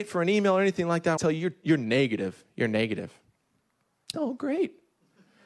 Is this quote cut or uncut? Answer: cut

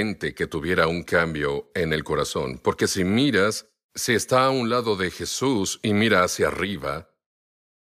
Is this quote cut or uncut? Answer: uncut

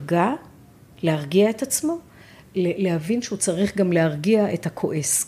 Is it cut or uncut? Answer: uncut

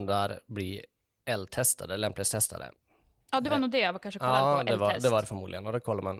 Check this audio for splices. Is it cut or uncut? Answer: uncut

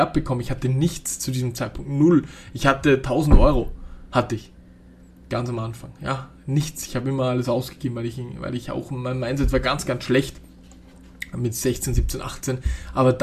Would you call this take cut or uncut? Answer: uncut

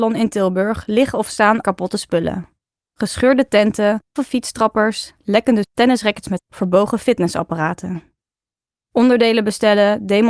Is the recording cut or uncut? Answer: cut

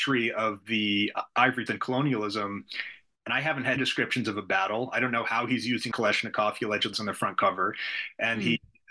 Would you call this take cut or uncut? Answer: cut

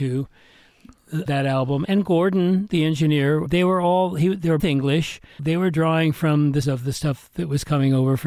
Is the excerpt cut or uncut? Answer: cut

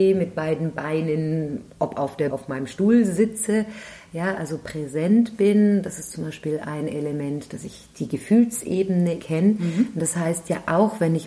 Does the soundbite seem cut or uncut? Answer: cut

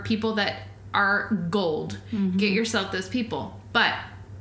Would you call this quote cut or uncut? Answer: uncut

